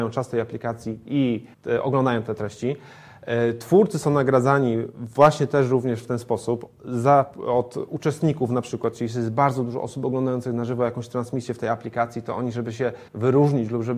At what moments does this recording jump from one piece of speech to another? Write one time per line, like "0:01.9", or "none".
0:01.5
0:13.1